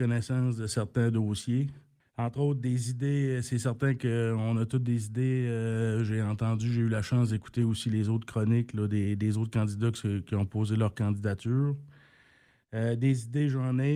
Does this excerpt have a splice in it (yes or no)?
no